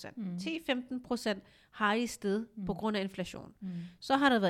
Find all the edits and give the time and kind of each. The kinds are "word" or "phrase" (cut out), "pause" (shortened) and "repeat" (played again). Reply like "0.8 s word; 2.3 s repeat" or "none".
none